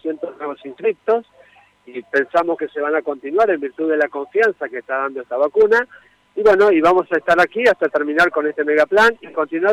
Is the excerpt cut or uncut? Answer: uncut